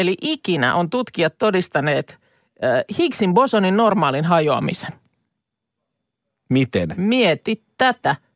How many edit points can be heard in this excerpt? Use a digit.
0